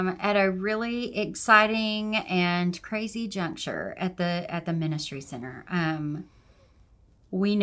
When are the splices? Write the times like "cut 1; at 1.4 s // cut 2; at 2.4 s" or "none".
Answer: none